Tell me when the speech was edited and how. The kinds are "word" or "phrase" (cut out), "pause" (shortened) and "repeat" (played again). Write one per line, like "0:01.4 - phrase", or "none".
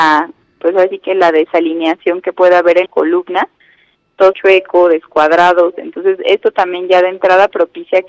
0:02.9 - word
0:04.3 - phrase